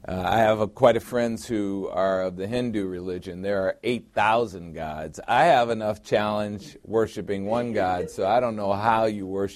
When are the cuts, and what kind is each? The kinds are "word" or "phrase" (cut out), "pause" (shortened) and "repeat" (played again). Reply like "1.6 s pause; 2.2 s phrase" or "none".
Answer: 1.0 s word